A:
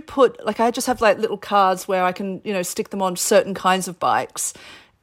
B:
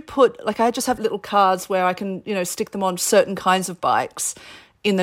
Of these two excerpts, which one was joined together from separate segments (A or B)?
B